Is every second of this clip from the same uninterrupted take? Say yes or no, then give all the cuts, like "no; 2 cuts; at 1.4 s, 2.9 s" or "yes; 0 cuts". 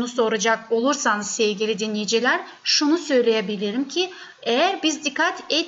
yes; 0 cuts